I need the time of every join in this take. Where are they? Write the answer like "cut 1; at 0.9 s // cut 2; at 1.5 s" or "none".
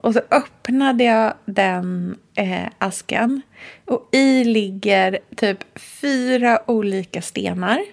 none

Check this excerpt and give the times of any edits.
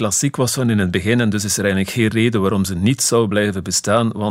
none

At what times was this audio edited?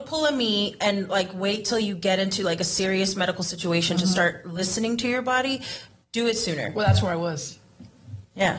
none

